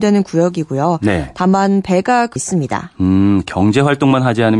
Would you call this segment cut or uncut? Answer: cut